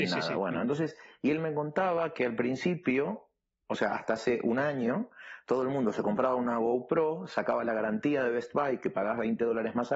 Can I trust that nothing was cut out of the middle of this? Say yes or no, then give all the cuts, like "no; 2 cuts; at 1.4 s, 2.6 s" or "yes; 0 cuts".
yes; 0 cuts